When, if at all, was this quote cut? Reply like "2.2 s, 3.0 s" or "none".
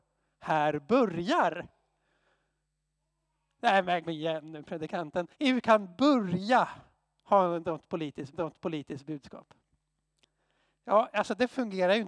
4.0 s, 5.3 s, 8.3 s

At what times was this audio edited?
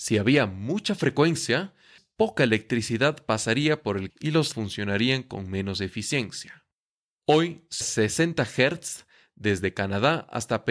2.0 s, 4.1 s, 4.5 s, 7.8 s

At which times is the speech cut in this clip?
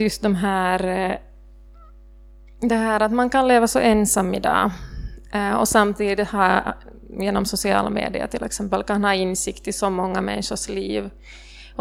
none

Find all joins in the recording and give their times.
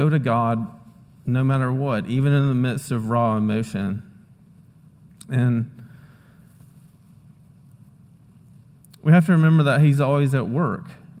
none

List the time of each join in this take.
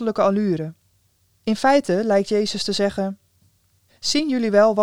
none

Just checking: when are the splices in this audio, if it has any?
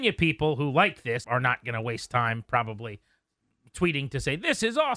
1.2 s

